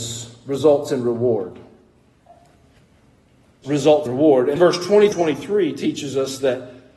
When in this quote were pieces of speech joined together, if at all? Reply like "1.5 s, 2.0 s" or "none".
3.6 s, 4.1 s, 4.6 s, 5.1 s